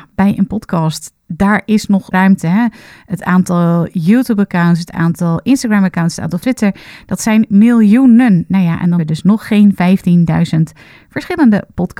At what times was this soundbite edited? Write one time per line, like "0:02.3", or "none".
0:02.1
0:06.4
0:09.0